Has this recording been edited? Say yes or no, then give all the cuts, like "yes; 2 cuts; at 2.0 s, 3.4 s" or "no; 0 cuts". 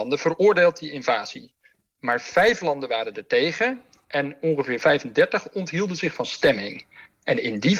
no; 0 cuts